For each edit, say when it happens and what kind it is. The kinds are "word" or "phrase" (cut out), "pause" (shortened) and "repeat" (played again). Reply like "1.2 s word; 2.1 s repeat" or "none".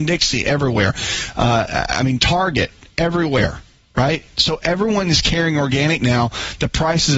none